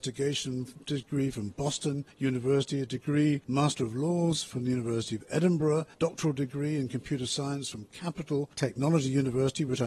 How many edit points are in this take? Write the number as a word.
four